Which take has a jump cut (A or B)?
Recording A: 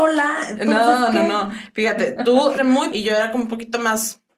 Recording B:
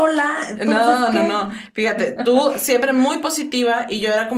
A